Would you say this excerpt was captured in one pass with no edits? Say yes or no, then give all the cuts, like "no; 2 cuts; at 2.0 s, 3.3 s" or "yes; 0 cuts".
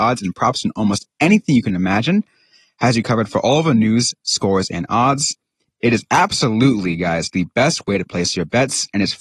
yes; 0 cuts